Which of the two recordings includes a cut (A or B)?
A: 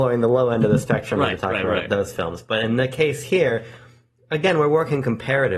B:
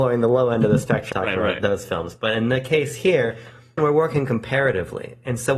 B